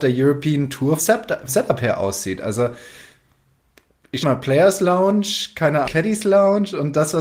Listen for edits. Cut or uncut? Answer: cut